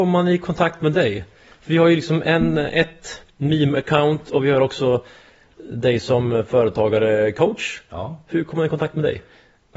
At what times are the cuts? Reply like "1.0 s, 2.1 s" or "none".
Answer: none